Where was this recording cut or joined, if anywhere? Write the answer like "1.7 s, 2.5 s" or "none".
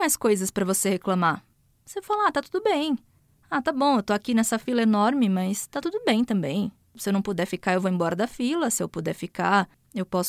none